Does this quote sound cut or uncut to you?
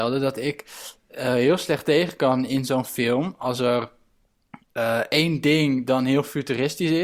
uncut